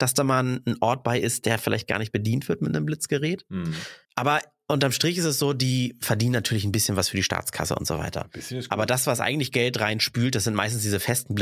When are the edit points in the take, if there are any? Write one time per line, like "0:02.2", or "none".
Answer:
0:04.0